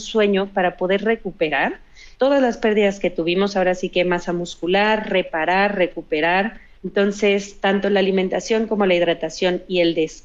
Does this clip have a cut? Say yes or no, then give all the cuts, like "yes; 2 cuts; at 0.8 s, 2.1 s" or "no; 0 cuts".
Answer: no; 0 cuts